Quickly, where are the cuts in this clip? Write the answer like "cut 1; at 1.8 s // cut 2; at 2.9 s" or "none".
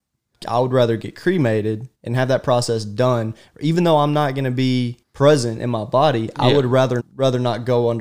cut 1; at 1.9 s // cut 2; at 5.0 s // cut 3; at 7.0 s